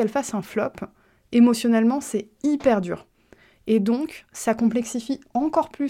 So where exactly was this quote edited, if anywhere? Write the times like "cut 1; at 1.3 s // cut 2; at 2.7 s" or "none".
none